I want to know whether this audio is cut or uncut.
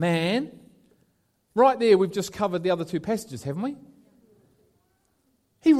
uncut